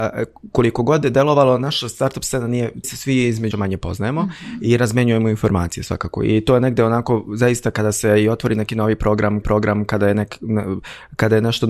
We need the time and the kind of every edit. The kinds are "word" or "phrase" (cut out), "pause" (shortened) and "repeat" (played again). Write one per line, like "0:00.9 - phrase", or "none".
0:02.8 - phrase
0:03.5 - phrase
0:09.4 - repeat